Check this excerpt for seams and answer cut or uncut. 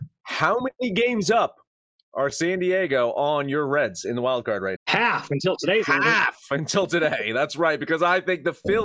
cut